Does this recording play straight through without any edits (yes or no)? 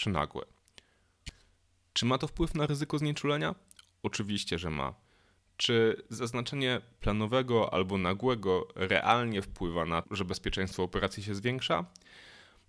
no